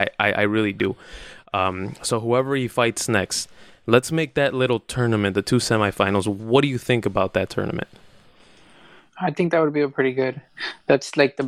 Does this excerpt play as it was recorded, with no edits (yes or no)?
yes